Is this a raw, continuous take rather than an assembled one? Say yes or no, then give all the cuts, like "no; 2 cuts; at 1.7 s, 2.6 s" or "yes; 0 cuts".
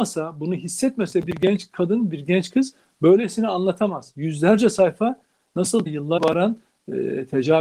no; 2 cuts; at 5.9 s, 6.2 s